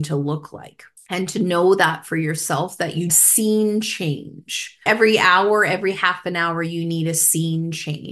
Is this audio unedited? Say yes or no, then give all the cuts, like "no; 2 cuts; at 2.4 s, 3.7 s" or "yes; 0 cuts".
no; 3 cuts; at 1.0 s, 3.1 s, 4.9 s